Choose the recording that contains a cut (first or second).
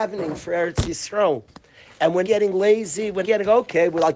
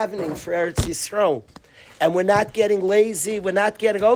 first